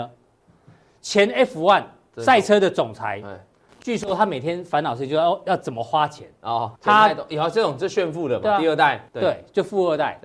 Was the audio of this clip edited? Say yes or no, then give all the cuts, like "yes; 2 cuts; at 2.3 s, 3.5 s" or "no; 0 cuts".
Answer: yes; 3 cuts; at 3.7 s, 6.8 s, 9.1 s